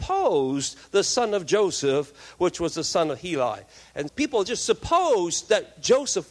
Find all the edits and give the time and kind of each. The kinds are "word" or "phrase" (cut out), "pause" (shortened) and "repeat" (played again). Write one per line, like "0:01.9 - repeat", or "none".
0:04.1 - word